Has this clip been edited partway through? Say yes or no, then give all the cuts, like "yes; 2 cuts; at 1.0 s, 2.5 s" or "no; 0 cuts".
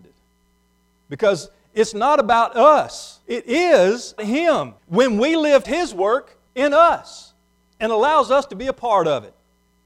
yes; 5 cuts; at 3.2 s, 4.2 s, 4.8 s, 5.6 s, 6.5 s